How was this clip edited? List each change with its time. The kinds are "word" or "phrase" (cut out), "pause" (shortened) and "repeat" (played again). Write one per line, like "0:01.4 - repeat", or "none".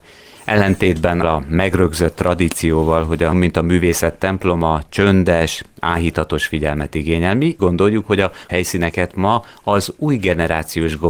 0:01.2 - word
0:03.3 - word
0:07.6 - word
0:08.5 - word